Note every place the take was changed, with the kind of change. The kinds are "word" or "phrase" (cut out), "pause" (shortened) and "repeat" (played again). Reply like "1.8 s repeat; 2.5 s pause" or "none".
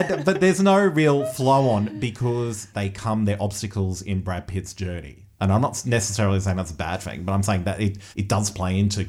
8.1 s pause